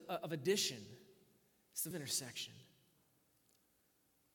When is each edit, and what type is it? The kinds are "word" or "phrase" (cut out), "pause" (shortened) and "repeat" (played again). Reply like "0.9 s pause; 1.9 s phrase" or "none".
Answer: 1.9 s word